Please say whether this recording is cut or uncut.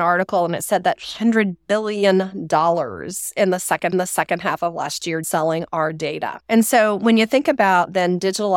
cut